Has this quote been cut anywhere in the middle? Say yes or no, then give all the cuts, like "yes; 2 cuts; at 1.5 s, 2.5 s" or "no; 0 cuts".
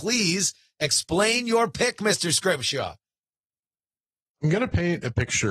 no; 0 cuts